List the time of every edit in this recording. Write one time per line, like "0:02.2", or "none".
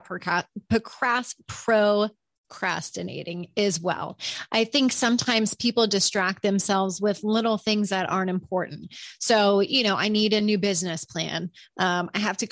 none